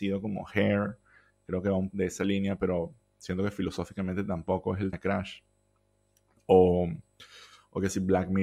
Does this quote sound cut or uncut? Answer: cut